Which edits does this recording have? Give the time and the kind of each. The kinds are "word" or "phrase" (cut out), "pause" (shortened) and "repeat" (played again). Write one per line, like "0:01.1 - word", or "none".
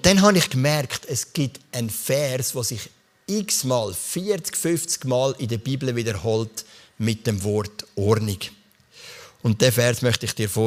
none